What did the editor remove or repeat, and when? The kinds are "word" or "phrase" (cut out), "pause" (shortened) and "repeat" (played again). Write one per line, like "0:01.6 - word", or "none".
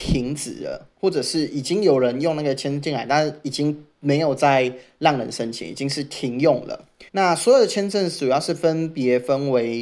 0:00.9 - pause
0:03.9 - pause
0:07.1 - pause

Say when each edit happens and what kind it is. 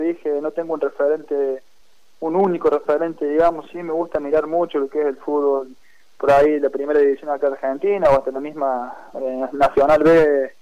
none

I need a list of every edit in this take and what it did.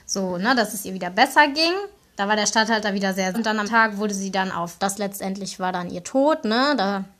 0:02.0 - pause
0:03.3 - word
0:03.7 - word
0:04.8 - phrase

